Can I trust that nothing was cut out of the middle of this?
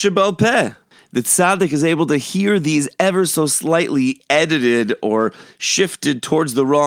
yes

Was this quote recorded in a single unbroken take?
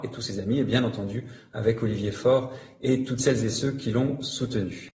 yes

